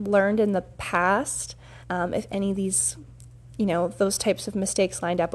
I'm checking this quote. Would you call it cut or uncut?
cut